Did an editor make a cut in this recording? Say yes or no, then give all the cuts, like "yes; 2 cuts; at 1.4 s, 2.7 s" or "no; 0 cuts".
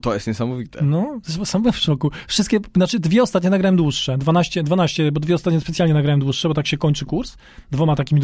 no; 0 cuts